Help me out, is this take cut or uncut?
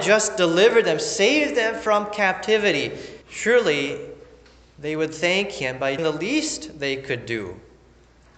cut